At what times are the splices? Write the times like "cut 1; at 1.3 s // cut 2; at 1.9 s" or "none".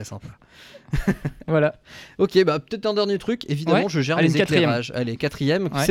none